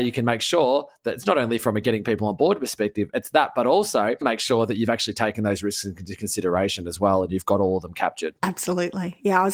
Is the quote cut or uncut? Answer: cut